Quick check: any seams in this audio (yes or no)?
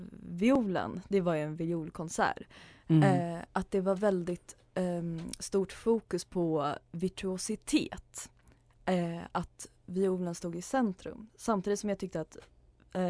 no